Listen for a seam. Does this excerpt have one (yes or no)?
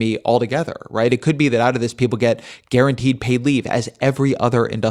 no